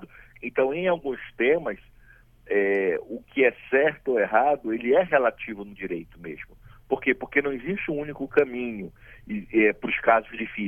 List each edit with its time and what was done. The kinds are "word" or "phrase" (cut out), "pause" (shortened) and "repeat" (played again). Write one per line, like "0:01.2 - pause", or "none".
none